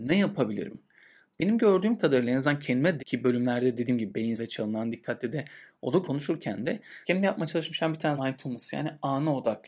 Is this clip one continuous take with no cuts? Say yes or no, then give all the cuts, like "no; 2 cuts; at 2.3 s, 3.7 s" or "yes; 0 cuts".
no; 5 cuts; at 3.0 s, 4.4 s, 6.0 s, 7.0 s, 8.2 s